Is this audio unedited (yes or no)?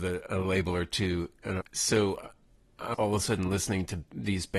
no